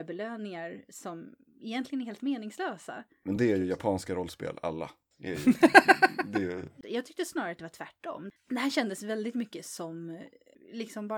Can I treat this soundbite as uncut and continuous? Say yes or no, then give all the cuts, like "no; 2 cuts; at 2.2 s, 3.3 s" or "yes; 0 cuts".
yes; 0 cuts